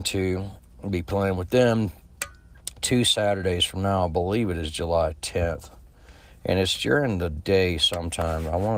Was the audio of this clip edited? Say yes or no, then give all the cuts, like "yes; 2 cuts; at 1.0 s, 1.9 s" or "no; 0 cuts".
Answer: no; 0 cuts